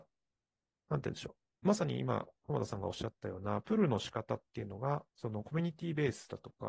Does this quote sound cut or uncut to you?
cut